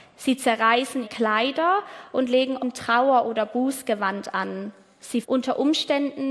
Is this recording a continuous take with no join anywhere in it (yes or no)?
no